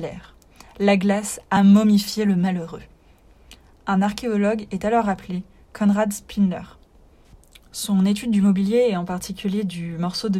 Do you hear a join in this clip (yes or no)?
no